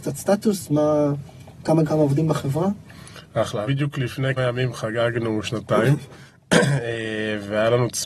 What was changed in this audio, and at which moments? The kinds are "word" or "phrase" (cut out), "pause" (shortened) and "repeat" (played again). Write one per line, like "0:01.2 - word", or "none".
0:01.8 - word
0:03.7 - phrase
0:04.4 - word
0:06.3 - pause